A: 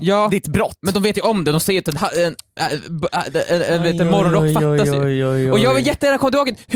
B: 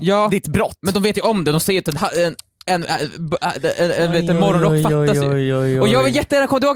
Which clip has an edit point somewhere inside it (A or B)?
A